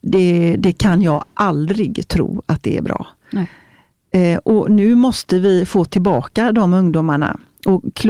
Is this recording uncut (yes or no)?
yes